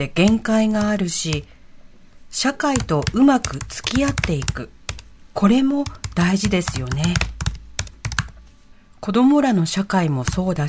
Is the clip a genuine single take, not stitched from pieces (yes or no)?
yes